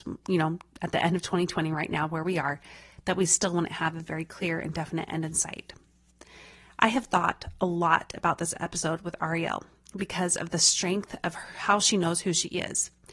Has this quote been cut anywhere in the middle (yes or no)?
no